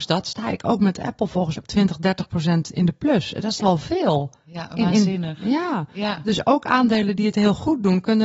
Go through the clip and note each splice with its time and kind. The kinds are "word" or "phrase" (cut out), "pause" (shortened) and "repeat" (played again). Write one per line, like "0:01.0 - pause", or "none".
0:01.6 - word
0:03.6 - word